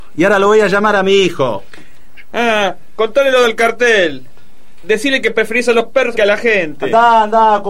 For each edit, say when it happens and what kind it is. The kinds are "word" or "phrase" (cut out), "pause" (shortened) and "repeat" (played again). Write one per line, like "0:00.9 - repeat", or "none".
0:06.1 - word